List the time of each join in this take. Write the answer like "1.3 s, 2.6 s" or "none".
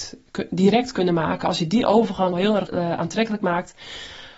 2.3 s, 2.7 s